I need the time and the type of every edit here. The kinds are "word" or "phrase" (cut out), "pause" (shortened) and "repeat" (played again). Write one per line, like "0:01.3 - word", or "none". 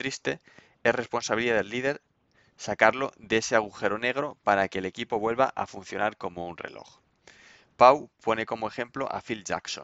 none